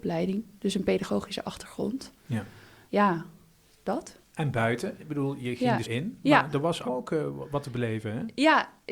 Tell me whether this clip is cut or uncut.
cut